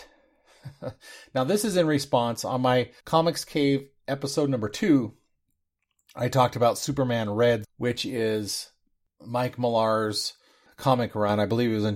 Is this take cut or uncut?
cut